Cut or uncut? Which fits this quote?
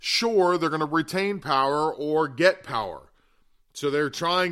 uncut